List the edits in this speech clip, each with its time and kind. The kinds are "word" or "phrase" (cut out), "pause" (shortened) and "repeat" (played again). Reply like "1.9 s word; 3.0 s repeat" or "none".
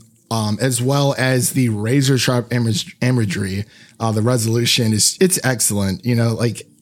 5.2 s word

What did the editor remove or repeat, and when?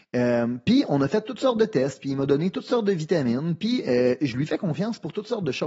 none

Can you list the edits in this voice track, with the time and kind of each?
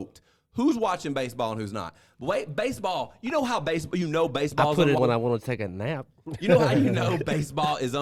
5.0 s word

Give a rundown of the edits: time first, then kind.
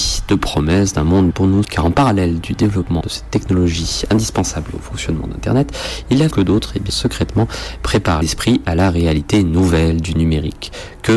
1.3 s word; 1.6 s word; 3.0 s word; 6.3 s word; 6.9 s word; 8.2 s word

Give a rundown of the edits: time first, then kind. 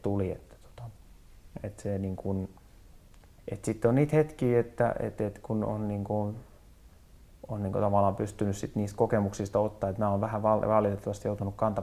none

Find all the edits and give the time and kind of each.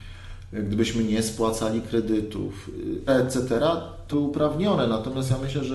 3.1 s word; 4.1 s phrase

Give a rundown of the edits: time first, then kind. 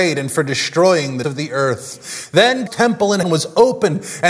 1.2 s word; 2.7 s word; 3.2 s word

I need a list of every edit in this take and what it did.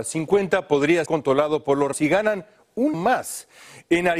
1.1 s word; 1.9 s word; 2.9 s word

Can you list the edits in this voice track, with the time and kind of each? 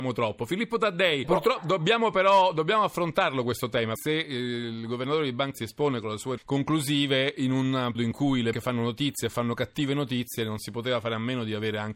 1.2 s word; 4.0 s word; 5.5 s word; 6.4 s word; 7.9 s word; 8.5 s word

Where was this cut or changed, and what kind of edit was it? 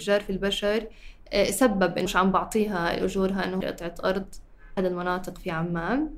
2.1 s word; 3.6 s word; 4.8 s word

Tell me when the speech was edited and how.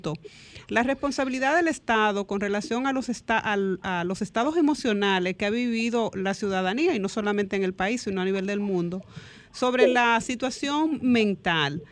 none

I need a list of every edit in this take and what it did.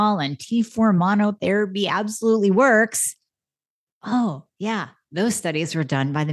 none

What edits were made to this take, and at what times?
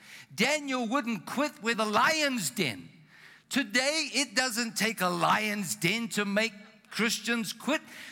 1.7 s phrase

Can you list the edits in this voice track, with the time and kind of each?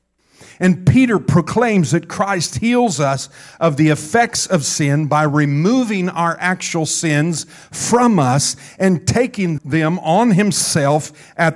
9.6 s word

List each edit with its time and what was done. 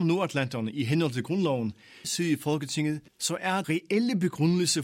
2.0 s word; 3.1 s pause; 3.6 s word

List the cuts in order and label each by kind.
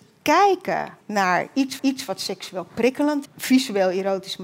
1.0 s pause; 1.8 s repeat; 3.3 s word

